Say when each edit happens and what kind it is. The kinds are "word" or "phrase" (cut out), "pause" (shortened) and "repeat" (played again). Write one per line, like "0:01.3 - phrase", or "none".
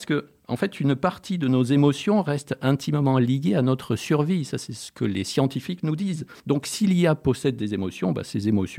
0:06.4 - pause

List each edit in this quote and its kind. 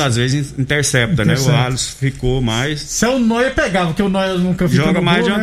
none

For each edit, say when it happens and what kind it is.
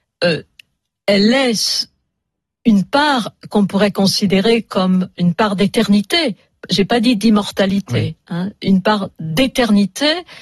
none

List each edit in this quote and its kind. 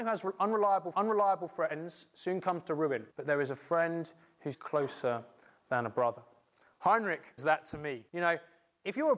0:00.9 - repeat
0:03.1 - pause
0:04.5 - word
0:07.4 - word
0:08.1 - pause

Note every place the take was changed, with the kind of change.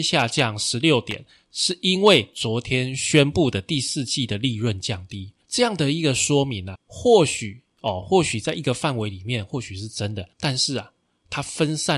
0:05.4 - pause
0:06.7 - word
0:10.3 - pause

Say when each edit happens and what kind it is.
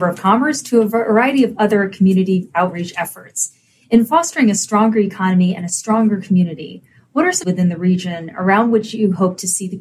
0:07.4 - word

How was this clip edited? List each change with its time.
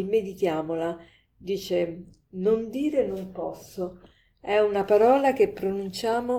none

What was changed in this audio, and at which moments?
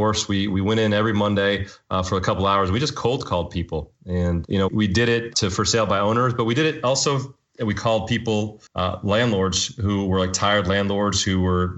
0:08.7 - pause

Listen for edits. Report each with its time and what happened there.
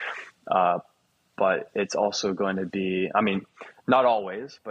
none

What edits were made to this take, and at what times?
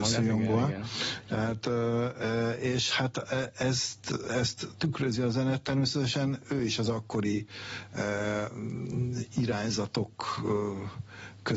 none

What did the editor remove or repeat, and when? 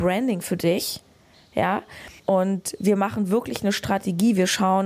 0:02.2 - pause

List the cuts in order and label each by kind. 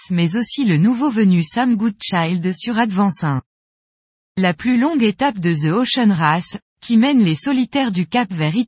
none

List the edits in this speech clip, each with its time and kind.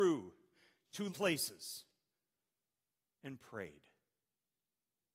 0:01.1 - word

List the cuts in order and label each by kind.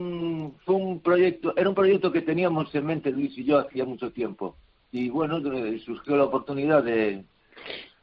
none

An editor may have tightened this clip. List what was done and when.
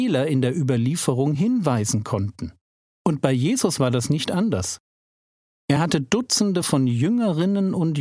none

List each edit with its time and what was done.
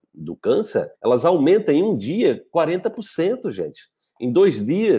0:00.9 - pause

